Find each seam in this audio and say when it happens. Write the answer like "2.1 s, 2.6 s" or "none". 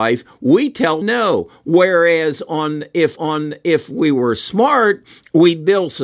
1.0 s, 3.2 s